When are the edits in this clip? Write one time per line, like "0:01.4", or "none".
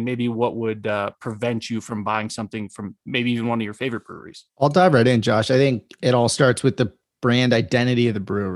0:04.5

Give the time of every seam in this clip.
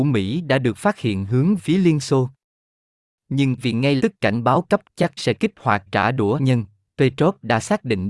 0:01.6
0:03.6
0:04.0
0:04.8
0:05.2
0:05.9
0:06.4

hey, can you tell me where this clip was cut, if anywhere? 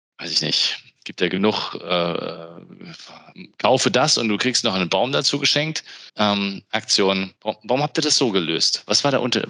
0:06.1
0:07.4

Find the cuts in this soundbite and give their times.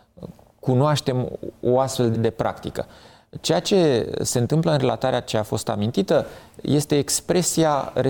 0:02.1

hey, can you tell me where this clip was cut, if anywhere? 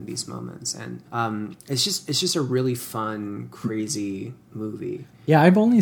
0:01.1

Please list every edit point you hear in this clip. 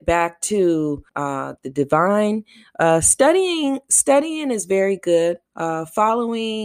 0:01.1
0:05.5

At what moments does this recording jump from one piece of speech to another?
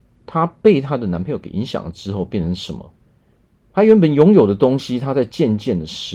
0:03.4

